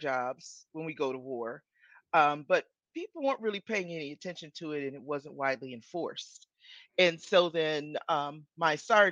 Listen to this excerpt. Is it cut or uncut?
uncut